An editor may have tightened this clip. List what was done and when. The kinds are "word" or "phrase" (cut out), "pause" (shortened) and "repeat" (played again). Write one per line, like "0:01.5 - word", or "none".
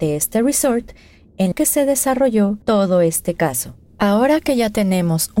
0:01.5 - word
0:02.6 - pause
0:03.9 - pause